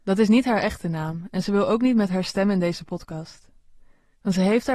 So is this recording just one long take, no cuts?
yes; 0 cuts

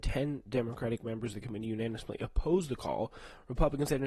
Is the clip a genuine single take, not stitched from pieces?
yes; 0 cuts

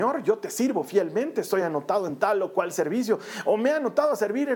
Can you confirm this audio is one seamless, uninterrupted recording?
yes; 0 cuts

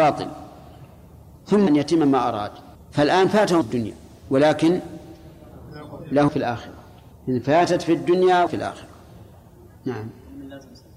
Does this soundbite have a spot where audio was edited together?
yes; 6 cuts; at 1.7 s, 2.8 s, 3.6 s, 6.3 s, 7.1 s, 8.5 s

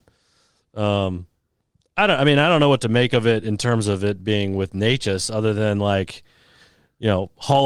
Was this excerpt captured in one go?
yes; 0 cuts

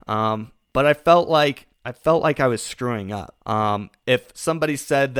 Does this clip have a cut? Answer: yes; 2 cuts; at 1.7 s, 3.4 s

